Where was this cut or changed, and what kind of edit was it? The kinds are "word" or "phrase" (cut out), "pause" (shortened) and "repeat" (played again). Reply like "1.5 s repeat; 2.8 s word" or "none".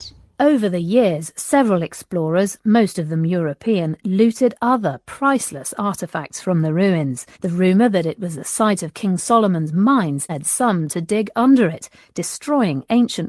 7.3 s pause; 10.3 s word